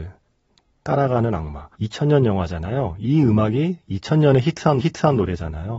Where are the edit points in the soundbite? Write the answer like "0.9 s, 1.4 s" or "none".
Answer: 1.7 s, 4.8 s

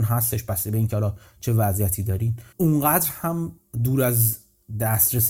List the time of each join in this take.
2.5 s

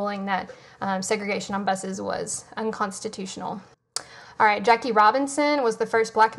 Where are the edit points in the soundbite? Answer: 3.7 s

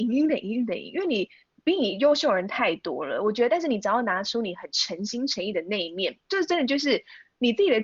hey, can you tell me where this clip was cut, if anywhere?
none

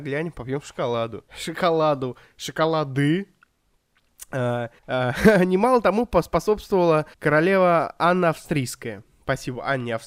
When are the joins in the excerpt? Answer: 1.3 s, 4.8 s, 7.1 s

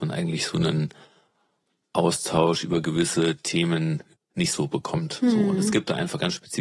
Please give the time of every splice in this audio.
none

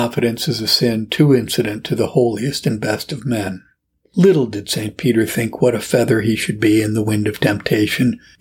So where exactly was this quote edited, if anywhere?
none

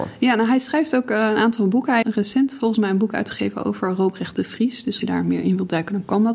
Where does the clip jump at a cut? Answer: 2.0 s, 5.0 s

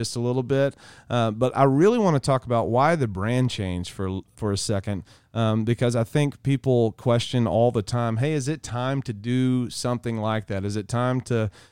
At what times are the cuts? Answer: 4.3 s

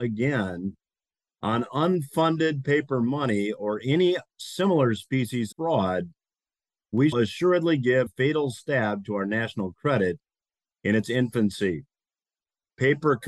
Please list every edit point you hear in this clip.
5.5 s, 7.1 s, 8.1 s

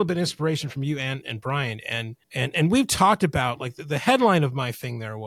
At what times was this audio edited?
1.2 s, 2.2 s

